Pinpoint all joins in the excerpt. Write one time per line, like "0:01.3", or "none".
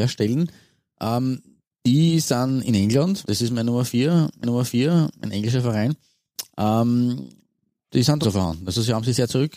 0:03.2
0:04.4
0:07.9
0:08.2